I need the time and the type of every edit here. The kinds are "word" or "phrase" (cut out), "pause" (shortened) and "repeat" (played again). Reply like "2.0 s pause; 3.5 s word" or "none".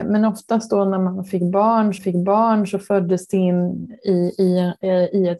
2.0 s repeat